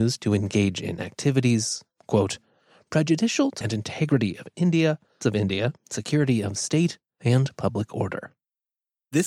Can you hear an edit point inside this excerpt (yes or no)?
yes